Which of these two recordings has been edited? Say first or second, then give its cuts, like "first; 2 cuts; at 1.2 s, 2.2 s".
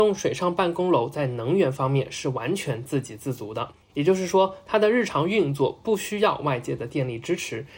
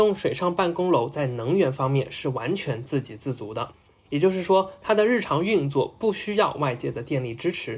first; 1 cut; at 3.8 s